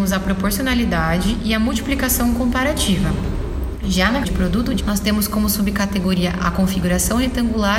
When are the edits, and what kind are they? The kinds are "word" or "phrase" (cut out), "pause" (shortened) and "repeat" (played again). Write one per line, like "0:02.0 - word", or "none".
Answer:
0:04.2 - word
0:04.8 - word